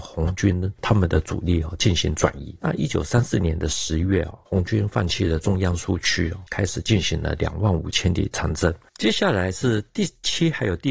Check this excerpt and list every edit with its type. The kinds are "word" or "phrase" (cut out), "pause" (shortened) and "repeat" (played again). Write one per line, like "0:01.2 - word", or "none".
0:04.5 - pause